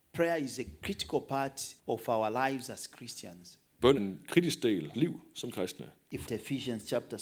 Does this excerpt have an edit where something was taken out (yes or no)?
yes